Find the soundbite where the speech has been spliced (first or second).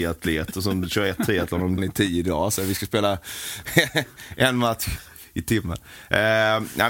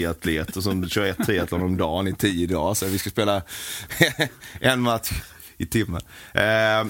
first